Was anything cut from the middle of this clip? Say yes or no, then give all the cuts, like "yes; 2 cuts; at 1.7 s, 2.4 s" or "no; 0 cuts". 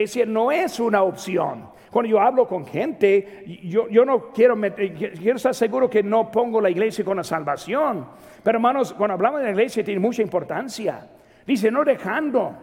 no; 0 cuts